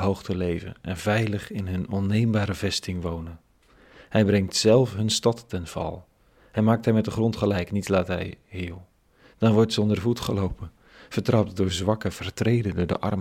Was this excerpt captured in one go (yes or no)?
yes